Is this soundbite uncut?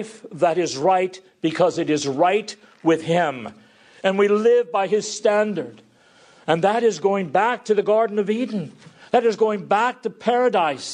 yes; 0 cuts

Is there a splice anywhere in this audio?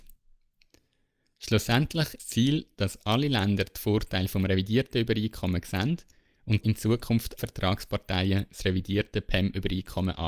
yes; 3 cuts; at 2.2 s, 6.6 s, 7.4 s

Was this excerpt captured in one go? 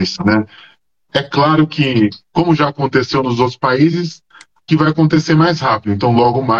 no; 1 cut; at 4.7 s

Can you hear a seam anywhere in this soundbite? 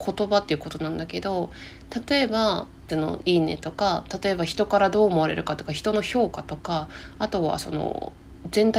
yes; 1 cut; at 2.9 s

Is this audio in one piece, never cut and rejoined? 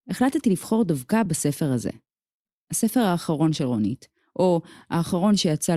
yes; 0 cuts

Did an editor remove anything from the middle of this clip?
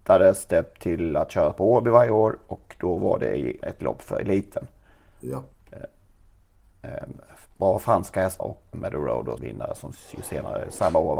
yes; 4 cuts; at 3.6 s, 8.4 s, 8.7 s, 9.4 s

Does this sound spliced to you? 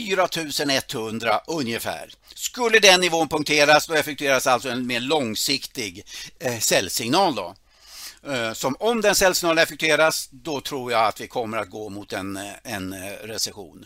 no; 0 cuts

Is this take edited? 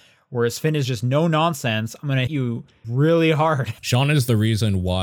yes; 3 cuts; at 2.3 s, 2.8 s, 3.8 s

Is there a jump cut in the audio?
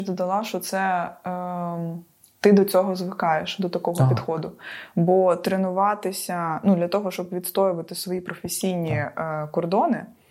no; 0 cuts

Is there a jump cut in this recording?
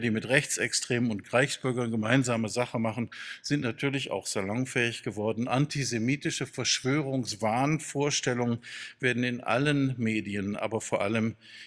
no; 0 cuts

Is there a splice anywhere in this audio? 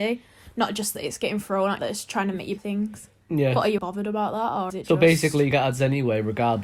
yes; 7 cuts; at 0.9 s, 1.8 s, 2.6 s, 3.2 s, 3.8 s, 4.7 s, 5.5 s

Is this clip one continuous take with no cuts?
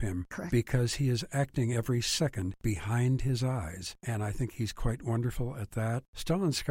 yes; 0 cuts

